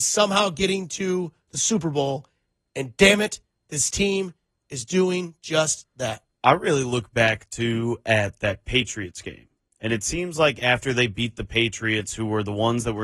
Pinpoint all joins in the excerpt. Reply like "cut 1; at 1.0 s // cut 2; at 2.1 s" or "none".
none